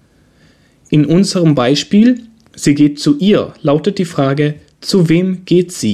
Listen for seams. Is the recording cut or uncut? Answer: uncut